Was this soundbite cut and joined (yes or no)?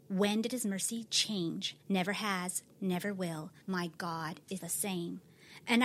yes